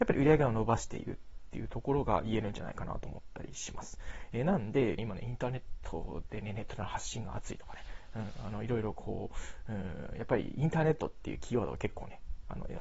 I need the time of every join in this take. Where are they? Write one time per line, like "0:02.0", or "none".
0:05.0